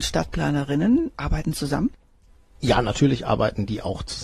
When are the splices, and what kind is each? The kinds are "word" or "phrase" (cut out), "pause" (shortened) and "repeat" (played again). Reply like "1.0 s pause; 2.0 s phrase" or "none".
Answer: none